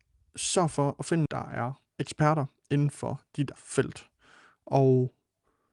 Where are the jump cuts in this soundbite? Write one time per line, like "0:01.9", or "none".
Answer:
0:01.3
0:03.6